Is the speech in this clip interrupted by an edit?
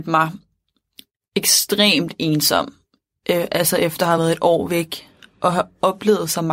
no; 0 cuts

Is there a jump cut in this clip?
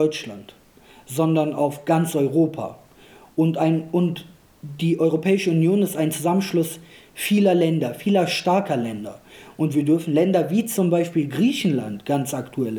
no; 0 cuts

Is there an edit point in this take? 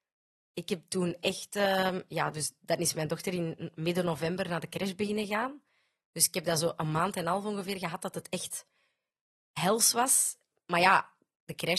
no; 0 cuts

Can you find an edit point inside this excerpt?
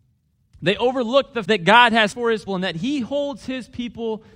yes; 3 cuts; at 1.5 s, 2.1 s, 2.5 s

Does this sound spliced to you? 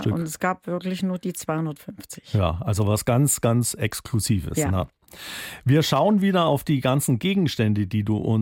no; 0 cuts

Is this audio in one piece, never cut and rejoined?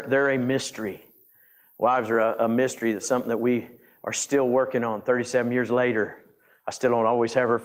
yes; 0 cuts

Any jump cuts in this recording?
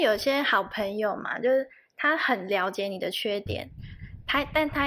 no; 0 cuts

